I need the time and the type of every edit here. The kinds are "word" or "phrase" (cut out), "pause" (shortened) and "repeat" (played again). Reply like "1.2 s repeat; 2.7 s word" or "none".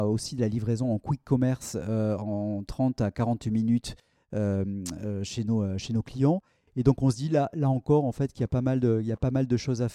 none